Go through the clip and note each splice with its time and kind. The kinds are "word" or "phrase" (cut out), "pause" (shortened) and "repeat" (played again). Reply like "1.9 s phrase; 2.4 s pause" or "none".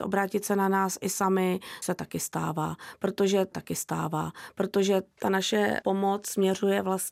1.8 s word; 3.5 s repeat; 5.8 s word